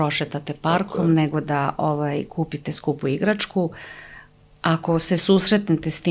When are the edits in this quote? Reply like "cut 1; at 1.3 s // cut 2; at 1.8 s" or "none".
none